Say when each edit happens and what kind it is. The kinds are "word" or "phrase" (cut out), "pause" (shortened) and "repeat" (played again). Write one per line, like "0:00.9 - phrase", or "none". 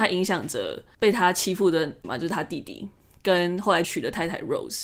0:02.0 - word
0:03.8 - word

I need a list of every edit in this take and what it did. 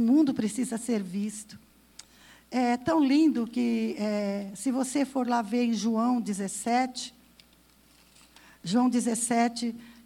none

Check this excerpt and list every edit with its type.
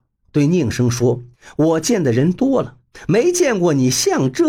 0:01.3 - pause

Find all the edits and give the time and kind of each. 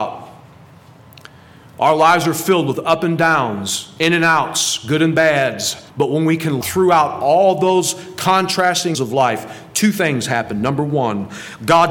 0:05.9 - pause
0:06.6 - phrase
0:08.9 - word

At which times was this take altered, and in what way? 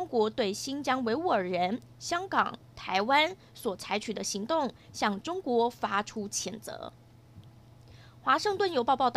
none

